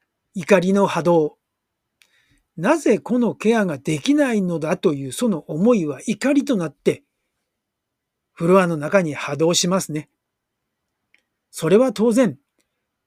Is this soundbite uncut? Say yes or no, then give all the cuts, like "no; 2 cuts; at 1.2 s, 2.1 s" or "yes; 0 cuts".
yes; 0 cuts